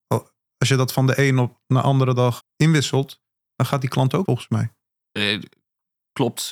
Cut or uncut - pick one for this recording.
cut